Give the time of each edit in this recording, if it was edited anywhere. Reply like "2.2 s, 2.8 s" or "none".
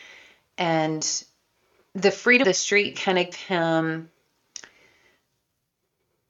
2.4 s, 3.3 s